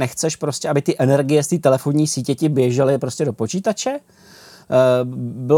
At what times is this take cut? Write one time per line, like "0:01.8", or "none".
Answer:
none